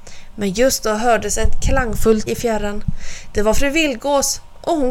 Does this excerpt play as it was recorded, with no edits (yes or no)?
no